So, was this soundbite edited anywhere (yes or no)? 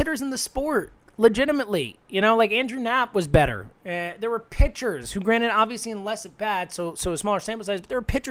no